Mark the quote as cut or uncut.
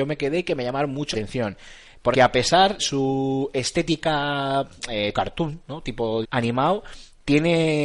cut